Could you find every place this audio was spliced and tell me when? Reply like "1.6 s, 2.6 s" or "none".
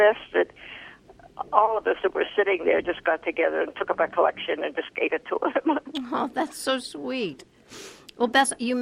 none